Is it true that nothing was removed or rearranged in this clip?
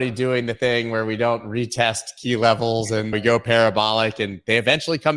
no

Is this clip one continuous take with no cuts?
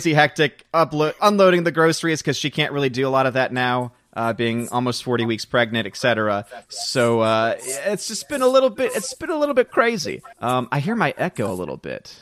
no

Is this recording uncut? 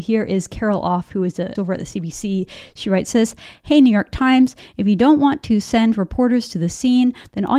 no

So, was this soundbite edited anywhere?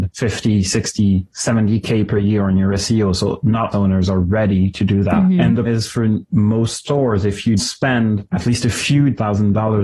yes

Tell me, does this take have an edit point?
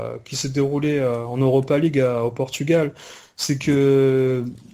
no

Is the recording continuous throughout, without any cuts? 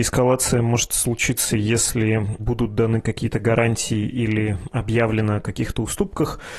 yes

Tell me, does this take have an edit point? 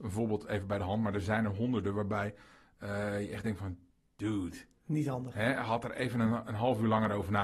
no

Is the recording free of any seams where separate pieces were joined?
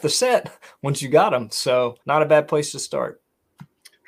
no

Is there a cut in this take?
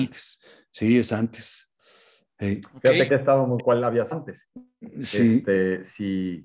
yes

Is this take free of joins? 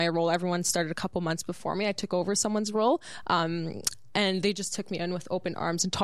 yes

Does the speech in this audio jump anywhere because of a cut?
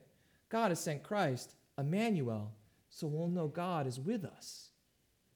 no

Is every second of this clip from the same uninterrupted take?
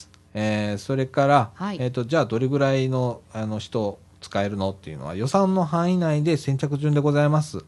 yes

